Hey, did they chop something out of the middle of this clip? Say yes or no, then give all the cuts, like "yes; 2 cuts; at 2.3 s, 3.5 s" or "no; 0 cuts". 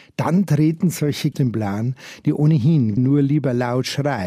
yes; 2 cuts; at 1.3 s, 3.0 s